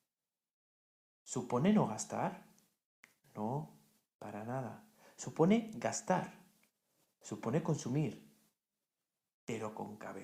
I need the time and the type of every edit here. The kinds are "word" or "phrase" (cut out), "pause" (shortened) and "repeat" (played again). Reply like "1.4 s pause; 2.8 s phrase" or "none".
none